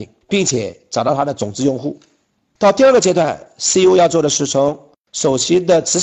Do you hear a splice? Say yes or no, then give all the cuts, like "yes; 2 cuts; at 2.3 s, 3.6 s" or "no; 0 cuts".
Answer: no; 0 cuts